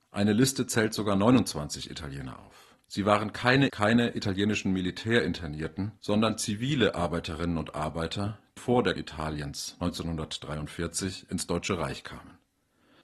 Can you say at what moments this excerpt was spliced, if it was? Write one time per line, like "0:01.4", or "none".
0:02.8
0:03.7
0:06.0
0:08.6
0:09.0